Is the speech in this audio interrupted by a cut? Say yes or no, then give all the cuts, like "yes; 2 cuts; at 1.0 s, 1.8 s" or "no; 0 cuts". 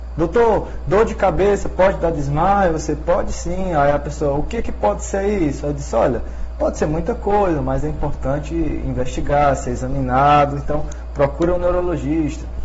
no; 0 cuts